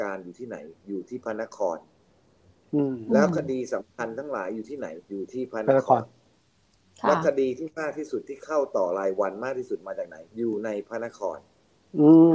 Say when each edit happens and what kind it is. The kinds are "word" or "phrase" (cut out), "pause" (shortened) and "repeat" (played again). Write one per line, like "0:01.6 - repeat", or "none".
0:05.0 - pause
0:10.3 - pause